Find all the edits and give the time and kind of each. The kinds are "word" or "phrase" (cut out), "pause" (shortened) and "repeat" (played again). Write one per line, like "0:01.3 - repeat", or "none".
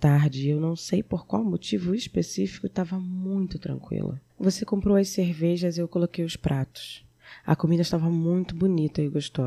0:04.3 - pause